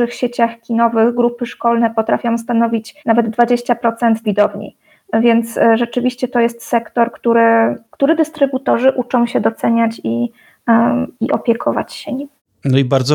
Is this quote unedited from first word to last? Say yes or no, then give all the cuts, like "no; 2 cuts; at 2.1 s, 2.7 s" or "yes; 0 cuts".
no; 4 cuts; at 3.0 s, 4.2 s, 7.9 s, 11.1 s